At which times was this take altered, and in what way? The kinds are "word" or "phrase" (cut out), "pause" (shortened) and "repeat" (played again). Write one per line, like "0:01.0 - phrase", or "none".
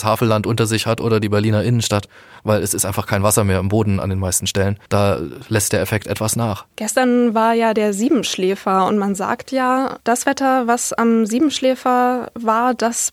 0:04.9 - pause